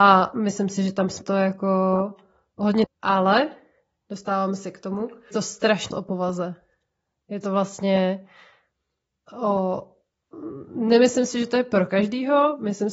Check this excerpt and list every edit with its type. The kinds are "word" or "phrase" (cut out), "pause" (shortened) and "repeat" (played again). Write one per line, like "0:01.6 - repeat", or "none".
0:01.2 - word
0:02.8 - word
0:05.3 - word
0:05.9 - word